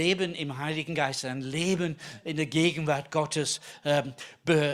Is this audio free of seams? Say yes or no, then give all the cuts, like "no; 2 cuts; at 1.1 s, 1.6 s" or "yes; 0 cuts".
yes; 0 cuts